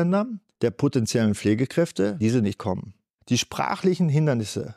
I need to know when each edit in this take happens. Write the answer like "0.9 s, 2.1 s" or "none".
2.2 s, 2.6 s